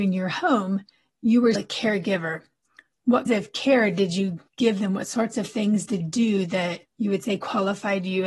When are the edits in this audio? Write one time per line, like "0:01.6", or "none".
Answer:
0:01.5
0:03.3
0:04.5
0:06.0
0:06.8